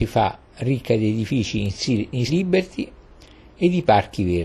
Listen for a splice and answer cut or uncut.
cut